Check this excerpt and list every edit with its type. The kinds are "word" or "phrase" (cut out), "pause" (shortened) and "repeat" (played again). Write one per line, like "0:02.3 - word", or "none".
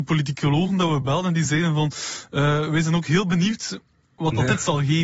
none

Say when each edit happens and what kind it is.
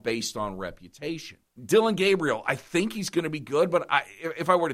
0:01.5 - pause

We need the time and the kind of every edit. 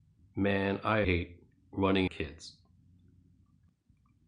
0:01.0 - word
0:02.1 - phrase

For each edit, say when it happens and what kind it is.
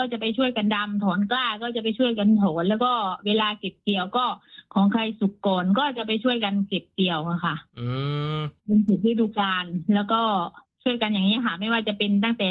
0:07.7 - pause
0:08.6 - pause
0:10.6 - pause

